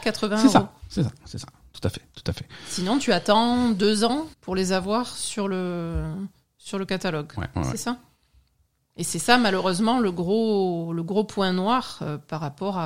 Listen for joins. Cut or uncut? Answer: cut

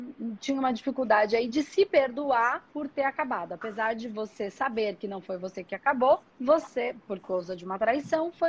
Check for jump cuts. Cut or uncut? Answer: cut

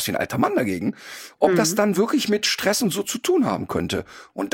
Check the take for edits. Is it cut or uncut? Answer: uncut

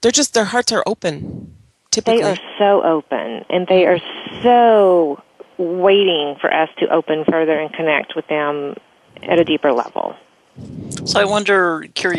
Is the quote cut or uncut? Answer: uncut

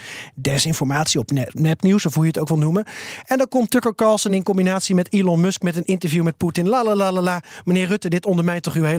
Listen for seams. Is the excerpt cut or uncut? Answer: uncut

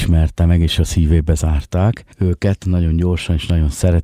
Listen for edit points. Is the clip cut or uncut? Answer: cut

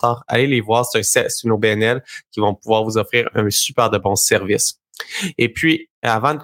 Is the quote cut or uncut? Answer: uncut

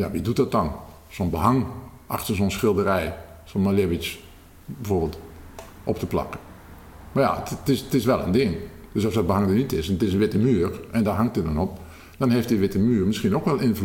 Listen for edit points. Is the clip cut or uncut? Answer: uncut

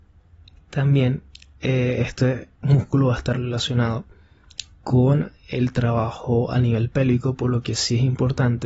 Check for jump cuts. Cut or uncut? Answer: cut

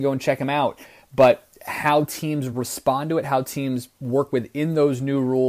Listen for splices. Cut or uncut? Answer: uncut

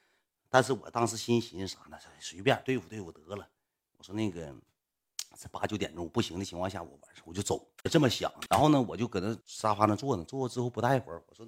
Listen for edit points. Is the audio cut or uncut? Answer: cut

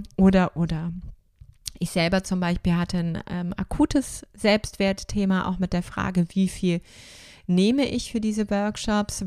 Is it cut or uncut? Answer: uncut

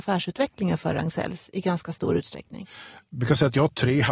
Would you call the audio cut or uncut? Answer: uncut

